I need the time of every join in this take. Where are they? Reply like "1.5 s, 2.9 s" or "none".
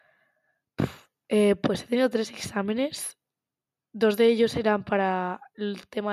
none